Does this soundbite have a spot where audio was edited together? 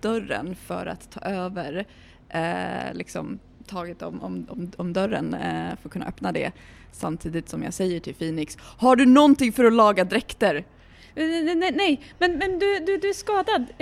no; 0 cuts

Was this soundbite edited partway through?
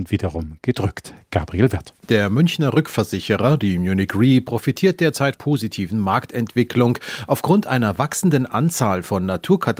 yes; 2 cuts; at 2.0 s, 5.3 s

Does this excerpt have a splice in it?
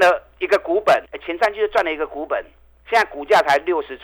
yes; 2 cuts; at 1.1 s, 2.6 s

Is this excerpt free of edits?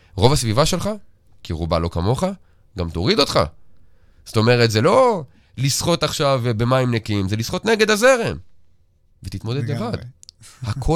yes; 0 cuts

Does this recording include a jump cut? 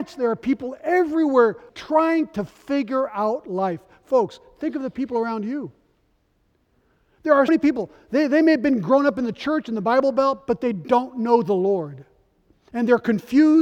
yes; 2 cuts; at 1.7 s, 7.5 s

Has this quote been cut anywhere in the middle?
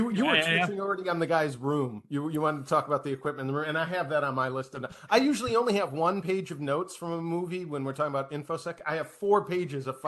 no; 0 cuts

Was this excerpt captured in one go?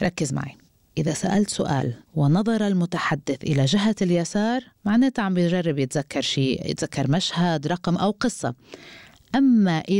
yes; 0 cuts

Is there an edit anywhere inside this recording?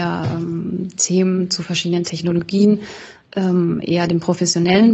no; 0 cuts

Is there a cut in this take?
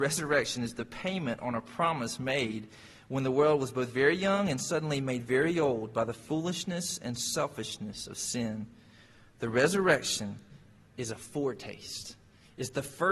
no; 0 cuts

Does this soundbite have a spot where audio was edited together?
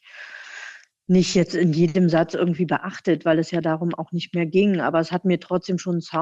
no; 0 cuts

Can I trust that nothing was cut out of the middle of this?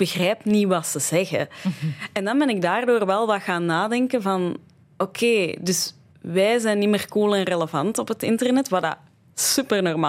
yes; 0 cuts

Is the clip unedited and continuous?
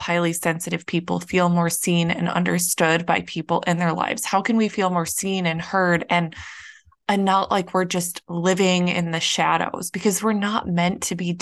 yes; 0 cuts

